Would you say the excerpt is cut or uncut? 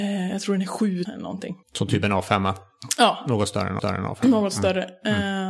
cut